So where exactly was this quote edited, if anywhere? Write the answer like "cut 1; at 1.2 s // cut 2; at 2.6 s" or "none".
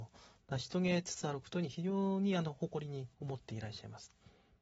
cut 1; at 3.1 s